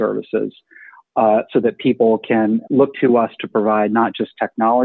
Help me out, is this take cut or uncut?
cut